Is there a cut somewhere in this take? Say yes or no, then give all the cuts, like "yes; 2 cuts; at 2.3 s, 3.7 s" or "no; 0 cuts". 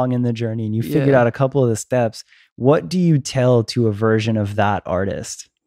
no; 0 cuts